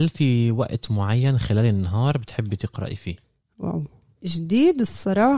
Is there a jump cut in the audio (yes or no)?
yes